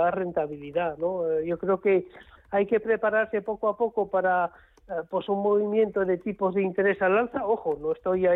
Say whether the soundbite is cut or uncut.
cut